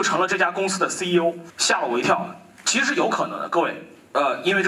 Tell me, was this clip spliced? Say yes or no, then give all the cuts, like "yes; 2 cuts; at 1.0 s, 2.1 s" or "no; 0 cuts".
no; 0 cuts